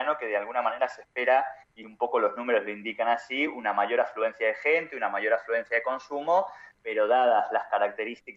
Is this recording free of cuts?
yes; 0 cuts

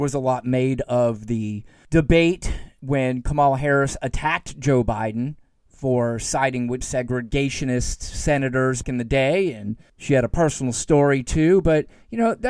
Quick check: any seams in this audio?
yes; 2 cuts; at 6.8 s, 8.8 s

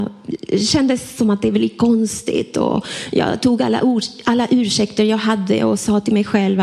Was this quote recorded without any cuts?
yes; 0 cuts

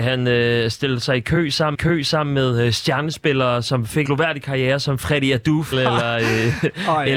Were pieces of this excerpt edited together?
yes; 3 cuts; at 1.7 s, 4.0 s, 5.7 s

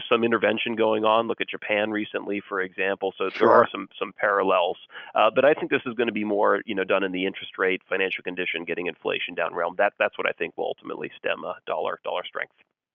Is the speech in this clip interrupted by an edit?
no; 0 cuts

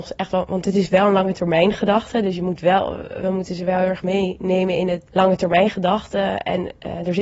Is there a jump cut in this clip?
yes; 1 cut; at 5.1 s

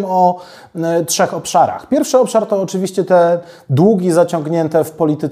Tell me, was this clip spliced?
no; 0 cuts

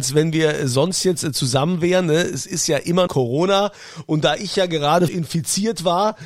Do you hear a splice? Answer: yes; 2 cuts; at 3.1 s, 5.1 s

